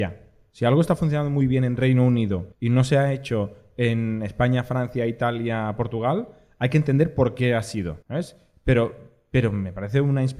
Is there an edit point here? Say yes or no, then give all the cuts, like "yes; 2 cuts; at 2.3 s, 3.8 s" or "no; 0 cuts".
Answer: yes; 2 cuts; at 2.5 s, 8.0 s